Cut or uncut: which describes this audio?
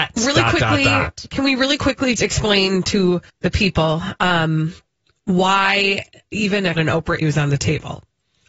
cut